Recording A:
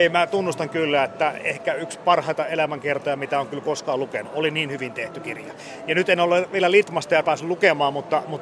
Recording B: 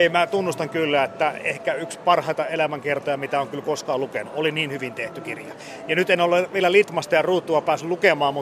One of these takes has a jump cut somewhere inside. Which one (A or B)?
A